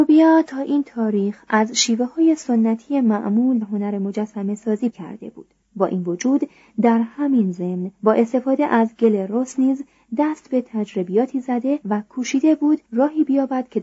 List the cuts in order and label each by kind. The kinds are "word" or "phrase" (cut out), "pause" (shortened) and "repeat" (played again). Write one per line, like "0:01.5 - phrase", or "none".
0:03.6 - word
0:04.9 - word
0:05.6 - pause
0:07.9 - pause
0:11.8 - pause
0:12.8 - pause